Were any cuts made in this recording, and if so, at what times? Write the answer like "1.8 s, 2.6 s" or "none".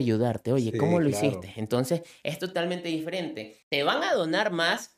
3.6 s